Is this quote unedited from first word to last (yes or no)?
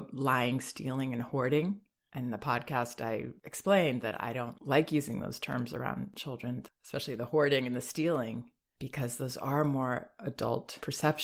yes